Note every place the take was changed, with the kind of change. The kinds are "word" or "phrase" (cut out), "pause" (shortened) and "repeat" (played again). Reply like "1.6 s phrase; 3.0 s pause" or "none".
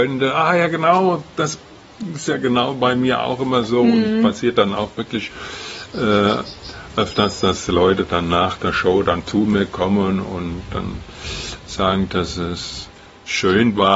none